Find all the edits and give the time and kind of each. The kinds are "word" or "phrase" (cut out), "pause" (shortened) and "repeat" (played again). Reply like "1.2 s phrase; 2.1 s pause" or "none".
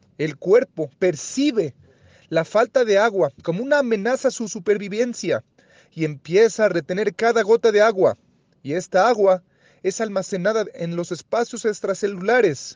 none

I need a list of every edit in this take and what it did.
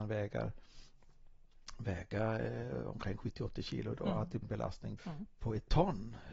4.4 s word; 5.0 s word

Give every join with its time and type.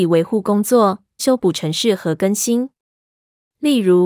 1.2 s phrase

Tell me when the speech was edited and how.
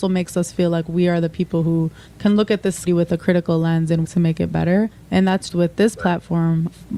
2.9 s word; 4.0 s word; 5.5 s word

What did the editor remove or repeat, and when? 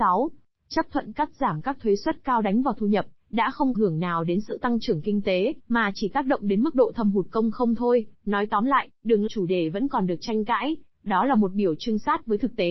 3.7 s phrase; 5.6 s pause; 8.1 s pause; 9.3 s phrase

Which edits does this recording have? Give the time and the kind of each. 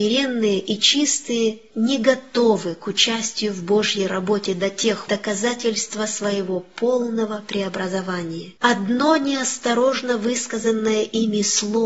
5.1 s phrase; 8.6 s pause

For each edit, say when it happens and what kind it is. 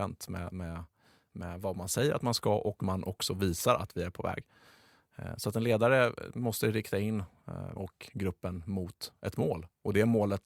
2.8 s word; 7.8 s word

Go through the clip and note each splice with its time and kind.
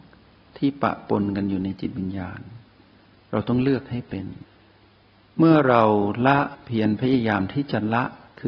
none

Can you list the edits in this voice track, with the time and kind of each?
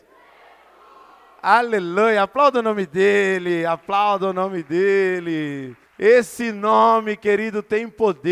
5.9 s pause

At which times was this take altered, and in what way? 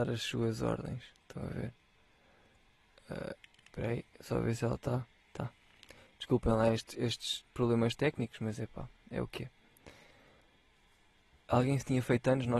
none

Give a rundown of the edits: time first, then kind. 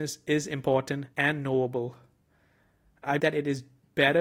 1.1 s pause; 3.2 s word

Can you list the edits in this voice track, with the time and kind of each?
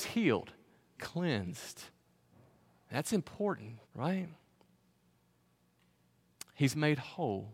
1.0 s word; 3.8 s pause

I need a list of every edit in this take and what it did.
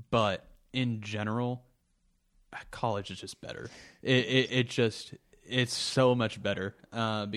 none

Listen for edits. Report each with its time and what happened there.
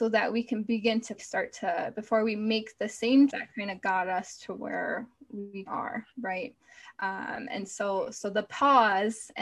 1.2 s phrase; 3.3 s word; 5.7 s word

